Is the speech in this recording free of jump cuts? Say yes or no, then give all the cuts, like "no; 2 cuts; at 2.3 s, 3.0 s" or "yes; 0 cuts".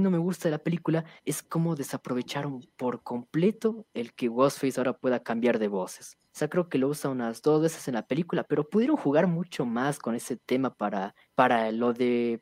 no; 3 cuts; at 1.2 s, 6.3 s, 11.3 s